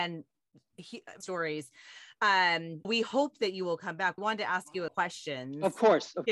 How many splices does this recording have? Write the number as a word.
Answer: four